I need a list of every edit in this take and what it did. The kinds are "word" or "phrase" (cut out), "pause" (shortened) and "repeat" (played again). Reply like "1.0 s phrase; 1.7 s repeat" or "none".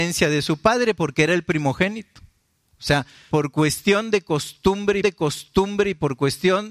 3.3 s word; 5.0 s repeat